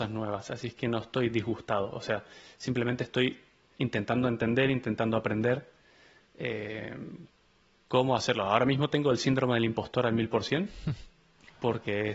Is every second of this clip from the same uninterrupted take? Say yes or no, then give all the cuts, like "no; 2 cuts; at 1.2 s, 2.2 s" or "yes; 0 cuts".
no; 1 cut; at 3.7 s